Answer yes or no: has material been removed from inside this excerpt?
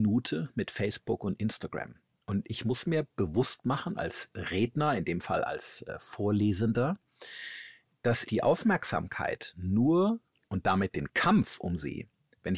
yes